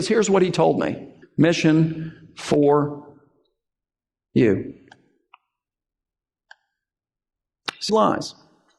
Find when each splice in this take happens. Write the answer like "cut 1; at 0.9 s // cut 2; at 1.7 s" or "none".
cut 1; at 1.2 s // cut 2; at 7.9 s